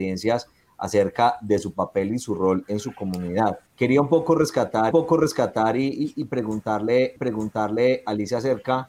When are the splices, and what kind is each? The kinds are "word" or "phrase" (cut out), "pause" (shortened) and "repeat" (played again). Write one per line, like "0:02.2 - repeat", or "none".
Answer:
0:03.7 - pause
0:04.9 - repeat
0:07.2 - repeat